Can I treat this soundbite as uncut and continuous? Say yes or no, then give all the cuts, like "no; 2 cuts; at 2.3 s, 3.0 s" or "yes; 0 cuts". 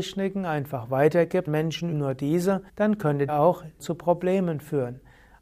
no; 5 cuts; at 1.5 s, 1.9 s, 2.7 s, 3.3 s, 3.8 s